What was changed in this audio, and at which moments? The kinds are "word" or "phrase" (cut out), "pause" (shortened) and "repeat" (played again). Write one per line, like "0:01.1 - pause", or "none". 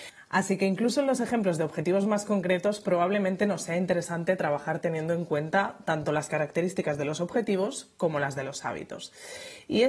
none